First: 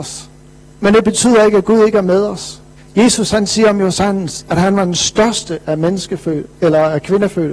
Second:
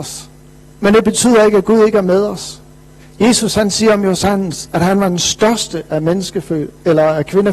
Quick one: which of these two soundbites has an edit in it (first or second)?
first